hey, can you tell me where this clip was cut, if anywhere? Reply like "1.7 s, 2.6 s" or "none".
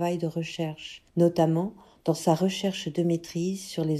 1.1 s